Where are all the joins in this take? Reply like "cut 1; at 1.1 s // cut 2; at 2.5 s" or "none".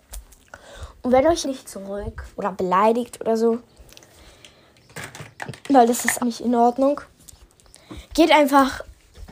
cut 1; at 1.4 s // cut 2; at 2.3 s // cut 3; at 6.2 s